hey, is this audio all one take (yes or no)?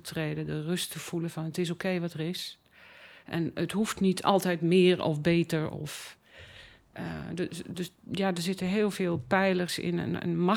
yes